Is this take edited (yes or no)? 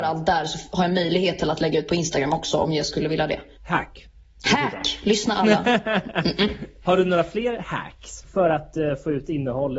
no